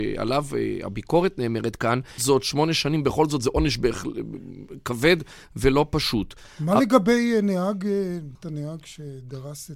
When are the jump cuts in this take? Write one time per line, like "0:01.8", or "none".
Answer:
0:02.2
0:08.3